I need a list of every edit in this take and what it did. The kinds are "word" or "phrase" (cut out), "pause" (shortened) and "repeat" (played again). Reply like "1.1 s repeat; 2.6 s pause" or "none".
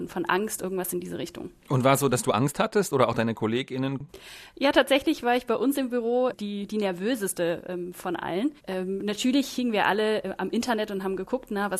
1.6 s pause; 6.3 s word; 8.6 s pause